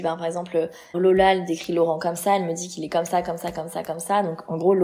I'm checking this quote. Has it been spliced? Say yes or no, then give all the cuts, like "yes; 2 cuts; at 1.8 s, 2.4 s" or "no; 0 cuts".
yes; 1 cut; at 0.9 s